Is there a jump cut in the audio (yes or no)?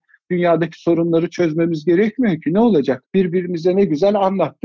yes